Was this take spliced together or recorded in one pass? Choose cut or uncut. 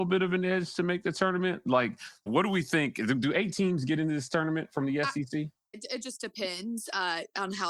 cut